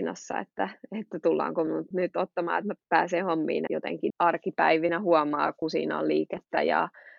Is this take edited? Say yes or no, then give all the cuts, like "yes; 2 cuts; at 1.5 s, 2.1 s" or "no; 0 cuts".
yes; 4 cuts; at 1.9 s, 2.8 s, 3.7 s, 4.1 s